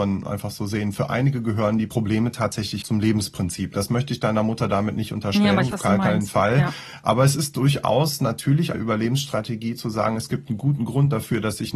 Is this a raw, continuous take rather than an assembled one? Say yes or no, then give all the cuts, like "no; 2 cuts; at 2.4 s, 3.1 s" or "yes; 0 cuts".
no; 3 cuts; at 2.8 s, 5.7 s, 8.7 s